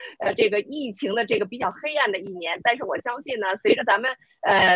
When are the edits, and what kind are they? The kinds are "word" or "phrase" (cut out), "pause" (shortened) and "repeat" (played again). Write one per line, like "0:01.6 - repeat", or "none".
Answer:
none